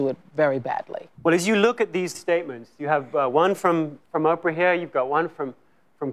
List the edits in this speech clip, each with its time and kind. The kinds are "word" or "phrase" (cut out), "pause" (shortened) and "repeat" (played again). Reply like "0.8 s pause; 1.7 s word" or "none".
1.1 s pause; 2.1 s word; 4.0 s pause